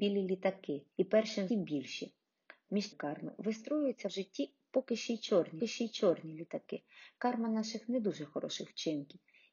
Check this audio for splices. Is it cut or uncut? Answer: cut